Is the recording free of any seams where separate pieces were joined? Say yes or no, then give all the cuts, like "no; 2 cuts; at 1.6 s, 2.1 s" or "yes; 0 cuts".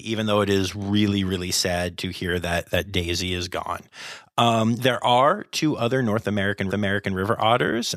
no; 1 cut; at 6.7 s